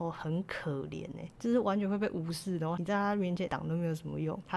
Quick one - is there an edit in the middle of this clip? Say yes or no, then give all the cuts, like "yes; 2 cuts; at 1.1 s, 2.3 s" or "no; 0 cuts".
no; 0 cuts